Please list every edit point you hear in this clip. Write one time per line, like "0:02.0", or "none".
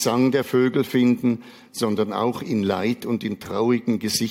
none